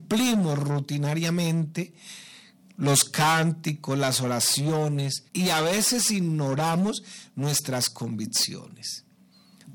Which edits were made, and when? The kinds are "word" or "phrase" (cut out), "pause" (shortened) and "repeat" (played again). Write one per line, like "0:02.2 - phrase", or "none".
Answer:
0:05.3 - pause